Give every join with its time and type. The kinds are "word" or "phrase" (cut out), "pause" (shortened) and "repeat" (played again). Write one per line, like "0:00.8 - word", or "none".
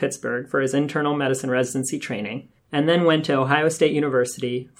none